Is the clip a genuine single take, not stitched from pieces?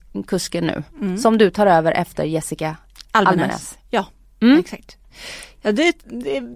yes; 0 cuts

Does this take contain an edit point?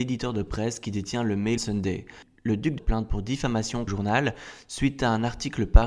yes; 3 cuts; at 1.6 s, 2.8 s, 3.9 s

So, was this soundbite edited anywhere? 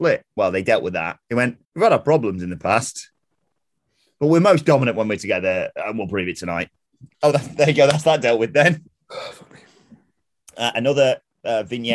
yes; 4 cuts; at 1.2 s, 1.6 s, 7.1 s, 8.9 s

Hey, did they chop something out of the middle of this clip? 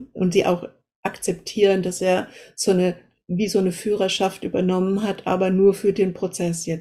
no; 0 cuts

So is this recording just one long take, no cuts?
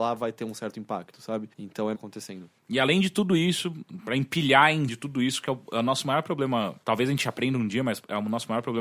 no; 6 cuts; at 1.5 s, 1.9 s, 2.6 s, 4.9 s, 5.5 s, 6.8 s

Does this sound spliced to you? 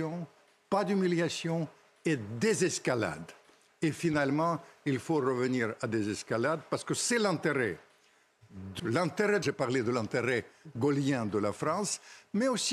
yes; 2 cuts; at 8.8 s, 9.4 s

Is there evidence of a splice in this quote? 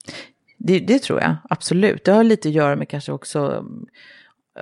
no; 0 cuts

